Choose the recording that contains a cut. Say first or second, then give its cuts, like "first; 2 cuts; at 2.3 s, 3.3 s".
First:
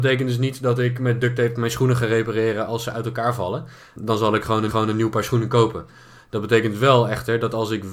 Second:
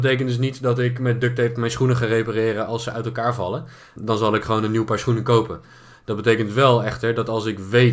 first; 1 cut; at 4.7 s